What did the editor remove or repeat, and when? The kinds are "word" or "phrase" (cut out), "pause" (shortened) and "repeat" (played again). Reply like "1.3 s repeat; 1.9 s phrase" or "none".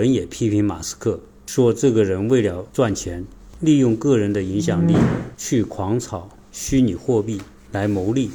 2.7 s pause